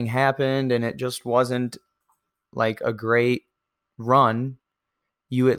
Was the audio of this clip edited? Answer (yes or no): no